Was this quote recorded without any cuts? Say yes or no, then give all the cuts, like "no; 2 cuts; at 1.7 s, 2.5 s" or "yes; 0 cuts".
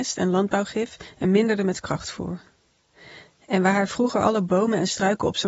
yes; 0 cuts